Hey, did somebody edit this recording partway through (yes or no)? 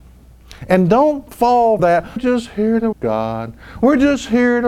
yes